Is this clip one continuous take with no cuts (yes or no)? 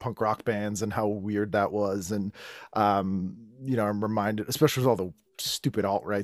yes